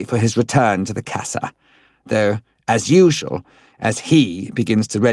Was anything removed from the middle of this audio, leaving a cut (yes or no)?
no